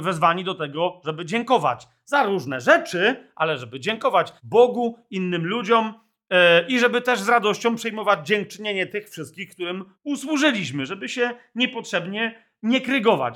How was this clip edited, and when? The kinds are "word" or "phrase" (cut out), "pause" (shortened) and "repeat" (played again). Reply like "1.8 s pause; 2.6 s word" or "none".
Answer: 4.4 s pause; 9.9 s pause